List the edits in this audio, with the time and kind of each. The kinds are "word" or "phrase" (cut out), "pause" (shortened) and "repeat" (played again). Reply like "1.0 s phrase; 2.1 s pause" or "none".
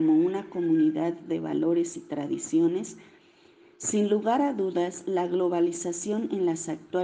none